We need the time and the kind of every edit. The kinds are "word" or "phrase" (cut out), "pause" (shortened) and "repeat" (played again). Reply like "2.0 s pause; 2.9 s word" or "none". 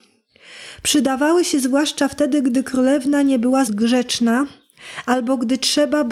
3.7 s word